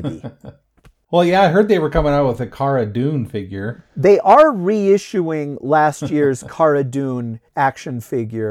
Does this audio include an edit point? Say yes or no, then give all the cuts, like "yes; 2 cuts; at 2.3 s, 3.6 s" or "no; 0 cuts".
yes; 1 cut; at 7.5 s